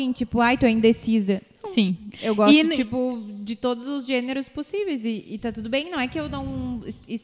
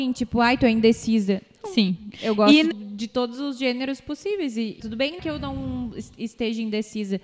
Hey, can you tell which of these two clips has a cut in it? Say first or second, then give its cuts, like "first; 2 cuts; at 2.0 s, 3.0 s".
second; 3 cuts; at 2.7 s, 4.8 s, 5.2 s